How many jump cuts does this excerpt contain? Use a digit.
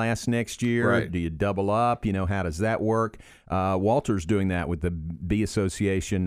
0